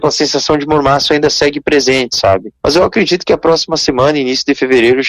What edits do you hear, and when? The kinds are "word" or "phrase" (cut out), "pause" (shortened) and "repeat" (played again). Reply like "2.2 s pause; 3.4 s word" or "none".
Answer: 2.6 s pause